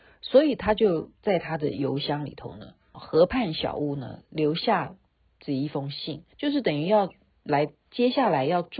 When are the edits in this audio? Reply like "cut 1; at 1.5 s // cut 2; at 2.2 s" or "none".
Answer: cut 1; at 2.9 s // cut 2; at 6.3 s